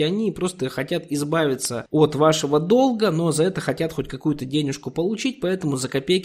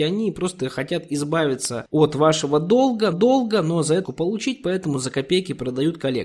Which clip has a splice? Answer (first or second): second